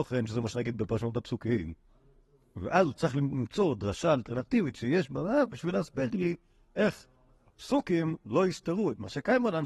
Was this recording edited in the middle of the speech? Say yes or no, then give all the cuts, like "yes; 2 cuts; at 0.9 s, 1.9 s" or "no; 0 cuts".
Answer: no; 0 cuts